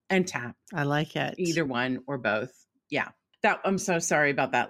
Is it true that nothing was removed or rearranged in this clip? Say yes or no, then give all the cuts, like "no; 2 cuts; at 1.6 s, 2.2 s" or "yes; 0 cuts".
yes; 0 cuts